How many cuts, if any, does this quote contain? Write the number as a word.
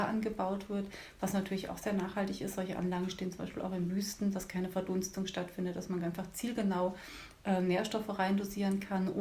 zero